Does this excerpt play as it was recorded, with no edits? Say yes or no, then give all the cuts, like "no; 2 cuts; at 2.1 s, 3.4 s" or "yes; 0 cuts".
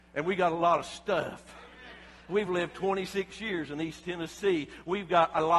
yes; 0 cuts